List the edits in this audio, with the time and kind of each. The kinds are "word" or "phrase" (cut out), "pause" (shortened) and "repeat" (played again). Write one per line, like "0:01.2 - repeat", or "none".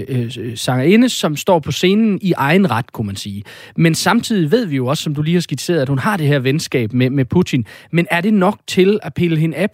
none